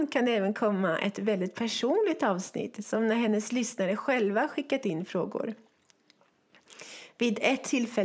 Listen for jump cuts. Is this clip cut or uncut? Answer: uncut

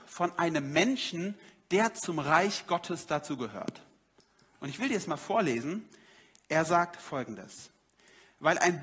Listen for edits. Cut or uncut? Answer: uncut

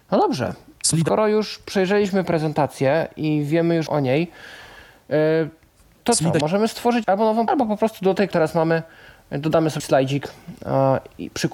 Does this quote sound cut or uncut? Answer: cut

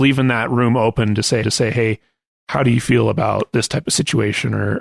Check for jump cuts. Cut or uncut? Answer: cut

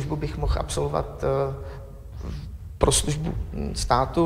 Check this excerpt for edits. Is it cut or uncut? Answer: uncut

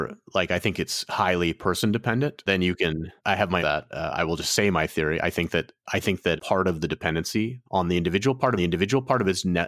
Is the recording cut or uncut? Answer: cut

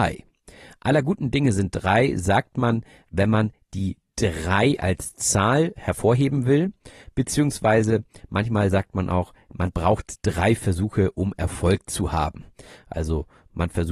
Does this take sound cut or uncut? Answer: uncut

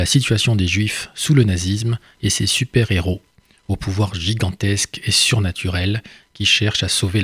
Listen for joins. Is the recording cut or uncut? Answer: uncut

